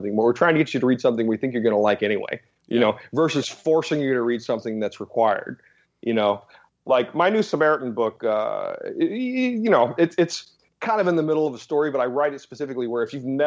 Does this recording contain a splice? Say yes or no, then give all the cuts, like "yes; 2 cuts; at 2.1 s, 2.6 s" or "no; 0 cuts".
no; 0 cuts